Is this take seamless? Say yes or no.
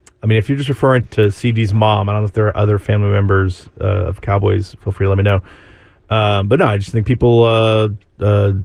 no